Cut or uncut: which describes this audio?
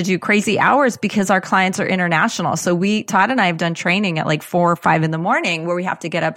uncut